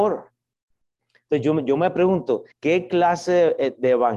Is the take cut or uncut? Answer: cut